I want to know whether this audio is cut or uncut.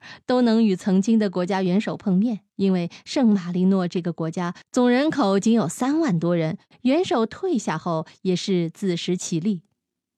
cut